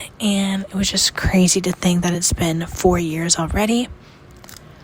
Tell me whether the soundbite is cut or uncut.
uncut